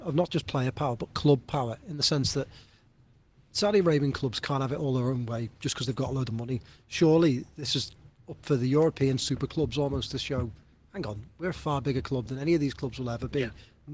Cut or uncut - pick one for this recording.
uncut